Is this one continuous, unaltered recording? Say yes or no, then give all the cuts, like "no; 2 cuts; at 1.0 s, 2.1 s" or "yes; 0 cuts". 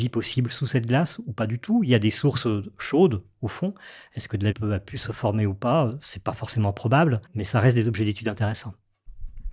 no; 2 cuts; at 4.5 s, 7.3 s